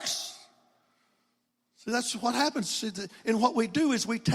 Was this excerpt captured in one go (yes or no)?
yes